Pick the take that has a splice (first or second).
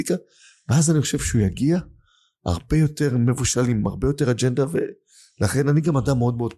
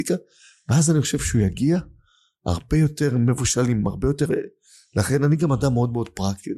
second